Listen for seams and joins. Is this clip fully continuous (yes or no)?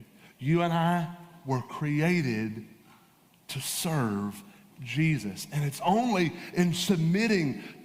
yes